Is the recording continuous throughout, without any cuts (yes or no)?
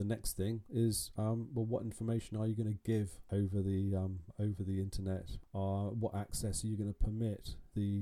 yes